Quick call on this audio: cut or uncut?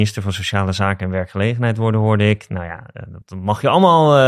cut